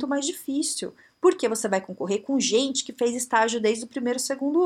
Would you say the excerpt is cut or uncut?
uncut